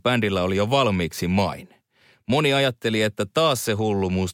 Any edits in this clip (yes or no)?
no